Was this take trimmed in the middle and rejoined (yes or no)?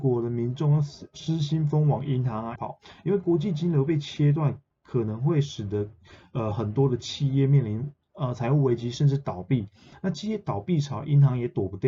yes